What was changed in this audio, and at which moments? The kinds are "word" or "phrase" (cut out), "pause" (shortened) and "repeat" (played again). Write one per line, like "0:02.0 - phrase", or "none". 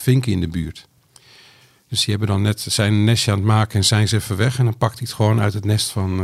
none